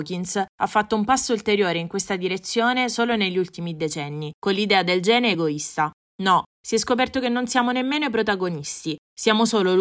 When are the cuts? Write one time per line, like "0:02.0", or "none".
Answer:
none